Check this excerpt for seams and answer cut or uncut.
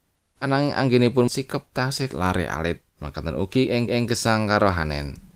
cut